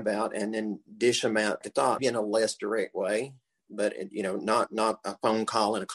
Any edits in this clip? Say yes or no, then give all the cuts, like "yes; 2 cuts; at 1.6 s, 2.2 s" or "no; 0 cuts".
yes; 2 cuts; at 1.6 s, 2.0 s